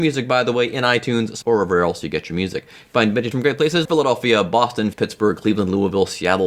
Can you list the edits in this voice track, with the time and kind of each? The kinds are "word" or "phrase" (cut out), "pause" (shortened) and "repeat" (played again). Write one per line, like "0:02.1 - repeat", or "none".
0:01.4 - word
0:03.3 - word
0:03.9 - word
0:04.9 - word